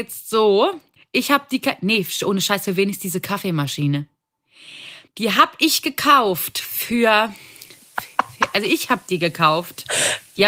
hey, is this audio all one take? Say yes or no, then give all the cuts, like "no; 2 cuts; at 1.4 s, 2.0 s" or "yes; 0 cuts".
no; 2 cuts; at 1.0 s, 5.1 s